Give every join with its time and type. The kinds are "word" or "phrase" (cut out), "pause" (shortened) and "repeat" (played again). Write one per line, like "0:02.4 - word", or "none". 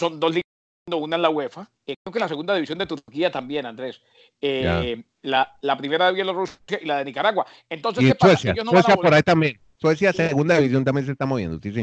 0:01.8 - pause